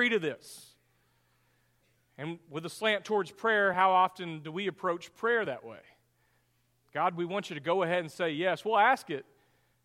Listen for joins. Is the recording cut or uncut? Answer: uncut